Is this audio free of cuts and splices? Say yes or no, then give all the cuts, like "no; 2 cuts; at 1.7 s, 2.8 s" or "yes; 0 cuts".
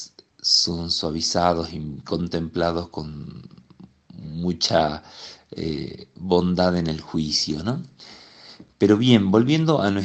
yes; 0 cuts